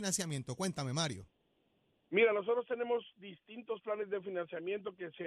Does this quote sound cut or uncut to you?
uncut